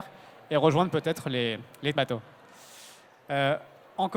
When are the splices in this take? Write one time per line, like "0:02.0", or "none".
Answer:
0:02.0